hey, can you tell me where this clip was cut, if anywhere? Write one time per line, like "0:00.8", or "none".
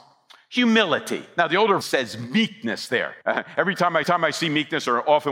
0:01.8
0:03.2
0:04.0